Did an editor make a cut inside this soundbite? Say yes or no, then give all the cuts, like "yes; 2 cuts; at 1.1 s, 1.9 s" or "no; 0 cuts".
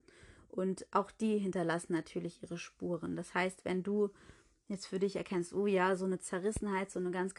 no; 0 cuts